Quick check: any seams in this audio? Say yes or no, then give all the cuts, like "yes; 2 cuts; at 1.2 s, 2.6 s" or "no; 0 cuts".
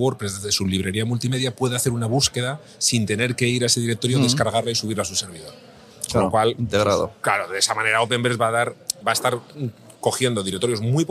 yes; 1 cut; at 9.0 s